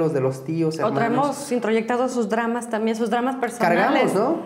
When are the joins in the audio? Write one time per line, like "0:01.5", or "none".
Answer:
none